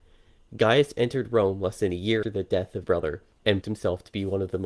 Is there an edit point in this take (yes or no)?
yes